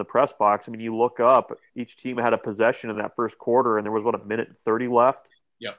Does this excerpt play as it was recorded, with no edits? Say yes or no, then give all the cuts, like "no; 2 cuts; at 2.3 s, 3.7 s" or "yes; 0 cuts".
yes; 0 cuts